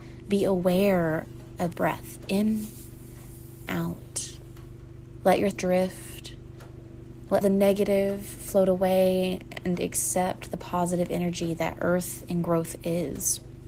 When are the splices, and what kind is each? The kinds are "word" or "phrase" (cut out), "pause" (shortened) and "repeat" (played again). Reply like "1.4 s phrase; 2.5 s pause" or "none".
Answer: 1.7 s word; 3.7 s word; 5.5 s word; 7.4 s word